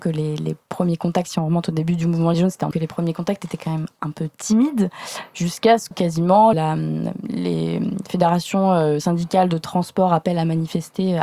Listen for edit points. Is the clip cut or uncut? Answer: cut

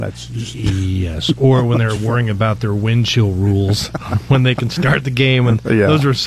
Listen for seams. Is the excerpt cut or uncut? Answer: uncut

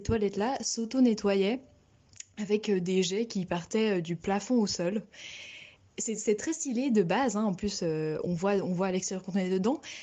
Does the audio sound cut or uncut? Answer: uncut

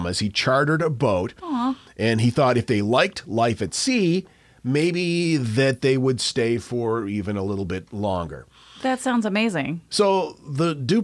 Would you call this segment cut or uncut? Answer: uncut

